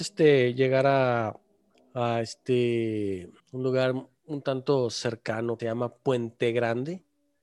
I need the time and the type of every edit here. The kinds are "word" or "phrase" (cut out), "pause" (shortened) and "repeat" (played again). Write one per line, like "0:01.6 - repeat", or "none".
0:01.7 - pause
0:03.4 - pause
0:05.6 - word